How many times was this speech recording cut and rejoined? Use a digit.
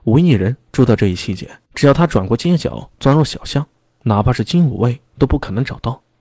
1